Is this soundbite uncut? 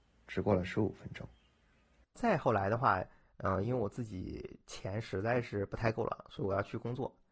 yes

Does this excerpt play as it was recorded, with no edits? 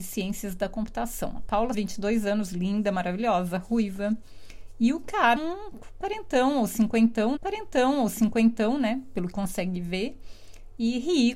no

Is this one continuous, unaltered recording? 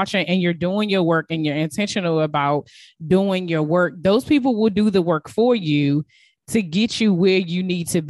yes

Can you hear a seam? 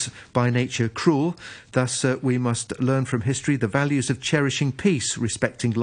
no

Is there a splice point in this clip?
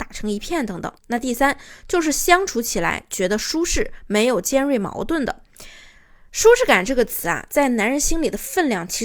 yes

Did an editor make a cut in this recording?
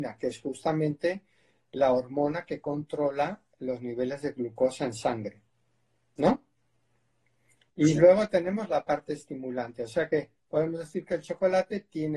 no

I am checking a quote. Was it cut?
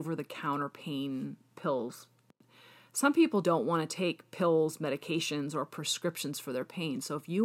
yes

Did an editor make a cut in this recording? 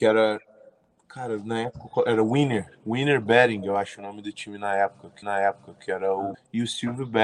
yes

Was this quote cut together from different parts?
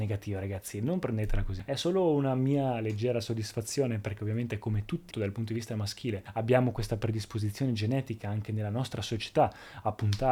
yes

